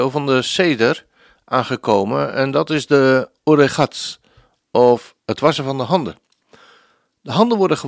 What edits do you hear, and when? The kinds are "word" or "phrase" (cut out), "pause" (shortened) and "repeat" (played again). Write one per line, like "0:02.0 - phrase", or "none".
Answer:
none